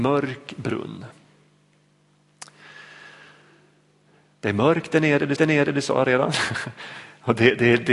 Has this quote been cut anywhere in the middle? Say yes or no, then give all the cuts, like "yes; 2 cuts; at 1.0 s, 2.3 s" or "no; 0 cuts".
yes; 1 cut; at 5.4 s